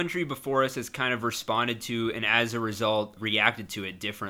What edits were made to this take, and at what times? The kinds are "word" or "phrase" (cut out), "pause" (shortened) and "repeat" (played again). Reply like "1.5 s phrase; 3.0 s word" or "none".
3.2 s word